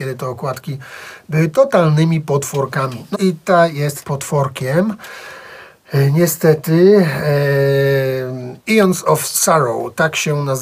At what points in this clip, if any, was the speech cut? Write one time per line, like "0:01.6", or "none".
0:03.1
0:04.0
0:08.6

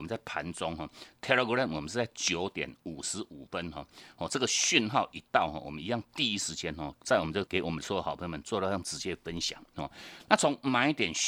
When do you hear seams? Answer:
0:07.5

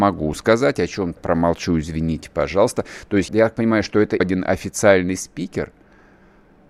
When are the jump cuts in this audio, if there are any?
0:01.2
0:03.3
0:04.2

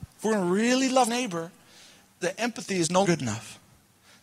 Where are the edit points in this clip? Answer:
0:01.1
0:02.2
0:03.0

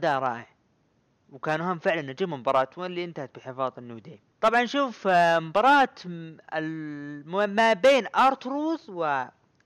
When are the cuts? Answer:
0:04.3

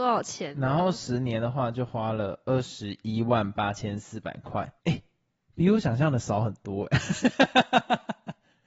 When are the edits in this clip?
0:04.8

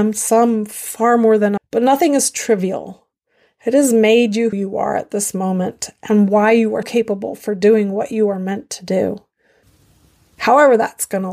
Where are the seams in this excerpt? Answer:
0:01.6
0:04.5
0:06.8

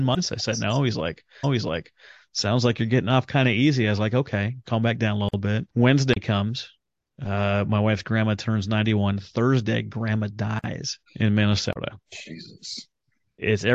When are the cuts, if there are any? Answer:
0:01.4
0:05.7
0:11.1

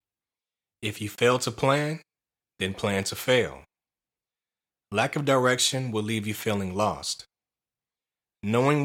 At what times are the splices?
none

